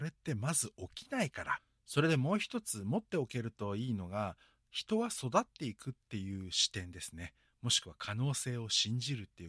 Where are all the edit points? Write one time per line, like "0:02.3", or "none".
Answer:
none